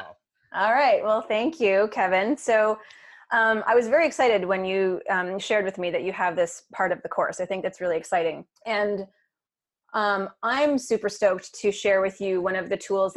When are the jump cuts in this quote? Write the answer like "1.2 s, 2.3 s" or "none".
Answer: 8.6 s